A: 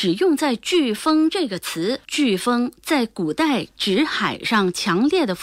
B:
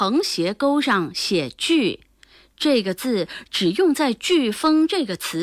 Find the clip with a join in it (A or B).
A